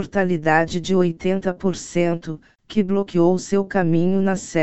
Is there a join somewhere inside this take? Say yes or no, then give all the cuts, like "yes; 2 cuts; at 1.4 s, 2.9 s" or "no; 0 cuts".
no; 0 cuts